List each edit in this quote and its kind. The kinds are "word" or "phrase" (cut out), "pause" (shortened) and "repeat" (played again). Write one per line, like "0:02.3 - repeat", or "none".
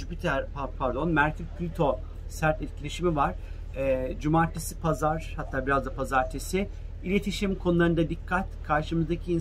none